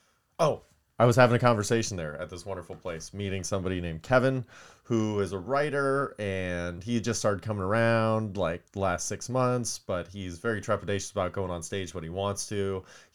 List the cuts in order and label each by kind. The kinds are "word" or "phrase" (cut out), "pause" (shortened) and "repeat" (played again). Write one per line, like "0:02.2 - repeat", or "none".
0:08.7 - pause